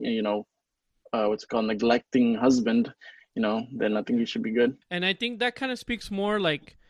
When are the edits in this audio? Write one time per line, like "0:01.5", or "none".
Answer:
0:04.8